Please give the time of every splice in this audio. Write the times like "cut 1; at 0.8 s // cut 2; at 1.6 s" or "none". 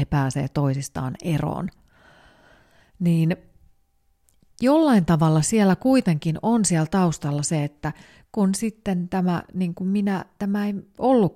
none

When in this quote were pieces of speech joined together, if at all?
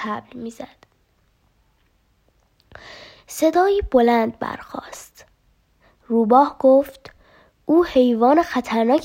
none

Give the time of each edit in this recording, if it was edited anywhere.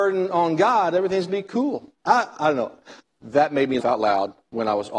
cut 1; at 1.3 s // cut 2; at 2.0 s // cut 3; at 3.0 s // cut 4; at 3.8 s

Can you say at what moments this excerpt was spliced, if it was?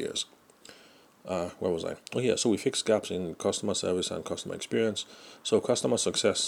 none

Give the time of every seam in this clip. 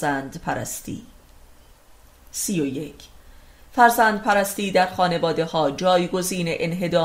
none

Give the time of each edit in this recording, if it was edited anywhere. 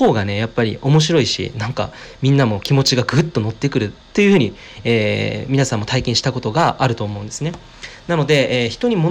none

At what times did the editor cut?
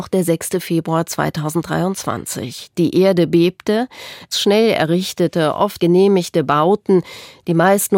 cut 1; at 4.3 s // cut 2; at 5.8 s

